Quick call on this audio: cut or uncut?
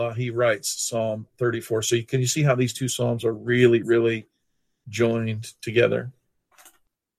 uncut